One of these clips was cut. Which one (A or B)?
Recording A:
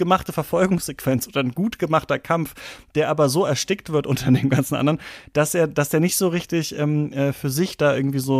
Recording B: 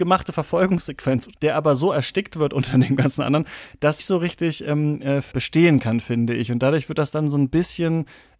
B